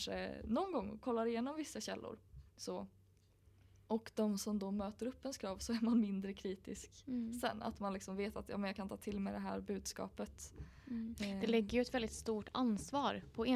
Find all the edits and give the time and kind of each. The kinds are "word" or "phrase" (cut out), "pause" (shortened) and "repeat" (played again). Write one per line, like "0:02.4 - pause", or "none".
0:02.5 - pause